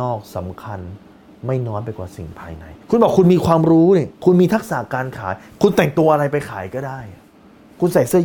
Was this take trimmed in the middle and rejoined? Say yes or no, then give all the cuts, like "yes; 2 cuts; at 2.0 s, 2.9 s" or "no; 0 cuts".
yes; 2 cuts; at 2.8 s, 4.1 s